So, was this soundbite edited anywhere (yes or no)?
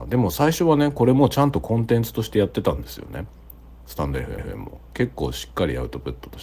yes